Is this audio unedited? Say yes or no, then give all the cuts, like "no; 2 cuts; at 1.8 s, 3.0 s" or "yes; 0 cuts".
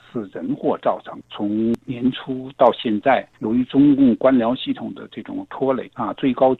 no; 1 cut; at 3.3 s